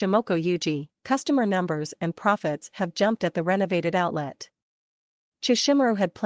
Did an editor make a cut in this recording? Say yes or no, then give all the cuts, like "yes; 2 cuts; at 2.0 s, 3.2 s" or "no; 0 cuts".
yes; 1 cut; at 1.0 s